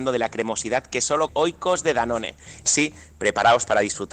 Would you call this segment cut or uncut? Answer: cut